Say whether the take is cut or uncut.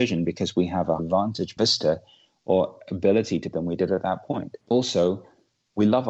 cut